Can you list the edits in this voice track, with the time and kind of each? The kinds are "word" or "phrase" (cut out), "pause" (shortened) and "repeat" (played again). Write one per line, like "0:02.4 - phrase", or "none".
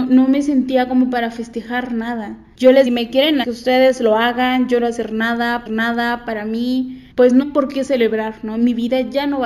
0:02.9 - phrase
0:03.4 - phrase
0:04.8 - phrase
0:05.7 - repeat
0:07.1 - pause
0:07.4 - word